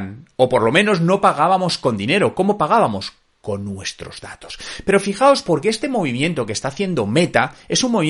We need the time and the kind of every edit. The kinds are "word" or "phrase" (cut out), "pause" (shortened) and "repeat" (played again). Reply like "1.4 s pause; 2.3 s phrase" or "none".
none

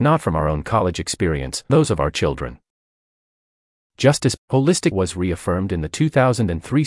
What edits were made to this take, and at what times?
1.7 s word; 4.4 s word; 4.9 s word

